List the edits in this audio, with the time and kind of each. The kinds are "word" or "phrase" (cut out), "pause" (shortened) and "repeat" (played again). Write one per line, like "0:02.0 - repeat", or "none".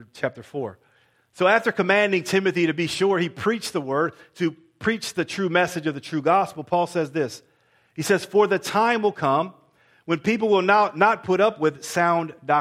none